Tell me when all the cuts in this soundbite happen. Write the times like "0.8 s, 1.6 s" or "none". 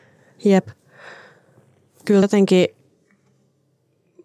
2.2 s